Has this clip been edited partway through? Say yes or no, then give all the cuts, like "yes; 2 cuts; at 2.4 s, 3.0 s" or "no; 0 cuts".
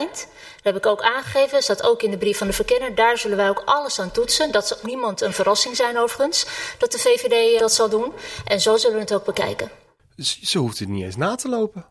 yes; 2 cuts; at 4.8 s, 7.6 s